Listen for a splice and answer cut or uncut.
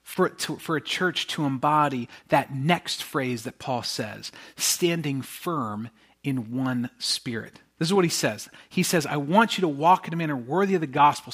uncut